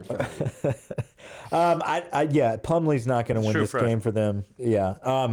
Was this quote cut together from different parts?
no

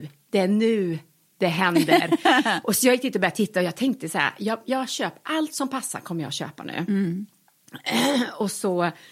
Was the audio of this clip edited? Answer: no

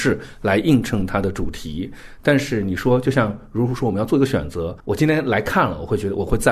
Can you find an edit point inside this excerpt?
yes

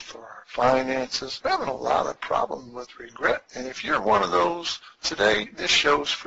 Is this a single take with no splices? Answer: yes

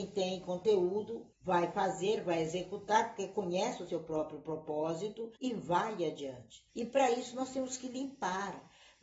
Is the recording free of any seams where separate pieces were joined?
no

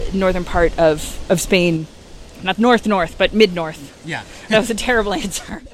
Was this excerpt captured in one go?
no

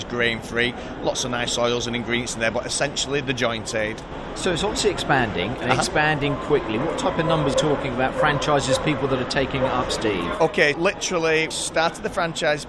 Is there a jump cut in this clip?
yes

